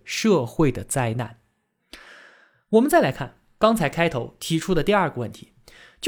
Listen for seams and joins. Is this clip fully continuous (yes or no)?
yes